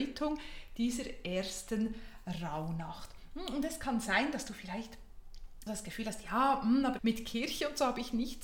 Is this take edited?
yes; 2 cuts; at 5.7 s, 7.0 s

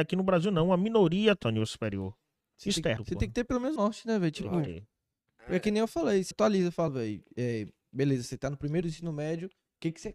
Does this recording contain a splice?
yes; 6 cuts; at 1.4 s, 3.0 s, 3.8 s, 6.3 s, 6.9 s, 8.8 s

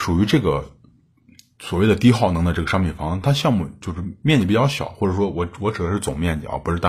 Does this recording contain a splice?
no; 0 cuts

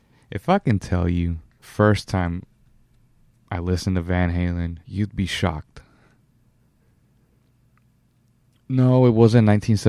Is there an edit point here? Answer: yes; 2 cuts; at 1.6 s, 4.8 s

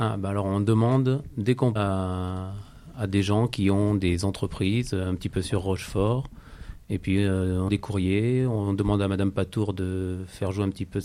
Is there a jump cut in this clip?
yes; 2 cuts; at 1.8 s, 7.7 s

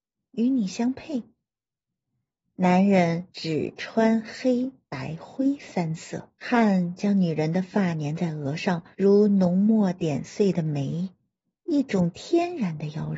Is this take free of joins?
no; 3 cuts; at 3.3 s, 6.4 s, 8.9 s

